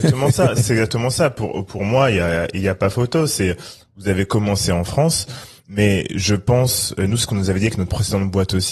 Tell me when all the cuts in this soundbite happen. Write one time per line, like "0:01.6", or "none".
none